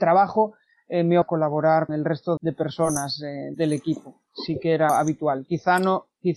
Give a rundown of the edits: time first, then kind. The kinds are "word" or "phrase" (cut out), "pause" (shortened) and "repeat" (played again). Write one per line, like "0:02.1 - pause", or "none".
0:01.2 - word
0:01.9 - word
0:02.4 - word
0:03.5 - word
0:04.9 - word